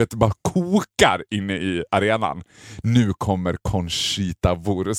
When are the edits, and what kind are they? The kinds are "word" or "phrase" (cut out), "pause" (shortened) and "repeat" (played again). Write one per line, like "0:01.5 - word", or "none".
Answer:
none